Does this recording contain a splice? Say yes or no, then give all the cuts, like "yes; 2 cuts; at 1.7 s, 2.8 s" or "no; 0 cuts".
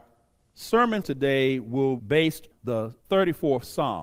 yes; 4 cuts; at 1.0 s, 2.0 s, 2.5 s, 3.0 s